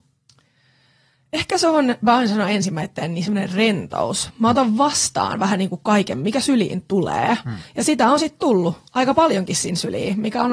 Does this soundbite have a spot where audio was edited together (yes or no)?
no